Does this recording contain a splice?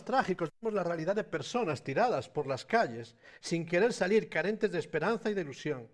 no; 0 cuts

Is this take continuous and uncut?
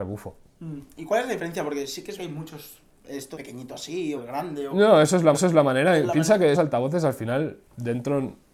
no; 5 cuts; at 2.2 s, 3.3 s, 4.2 s, 5.3 s, 6.5 s

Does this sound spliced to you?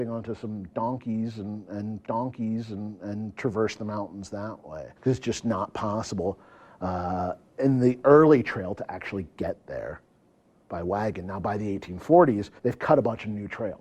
yes; 3 cuts; at 2.0 s, 5.0 s, 12.6 s

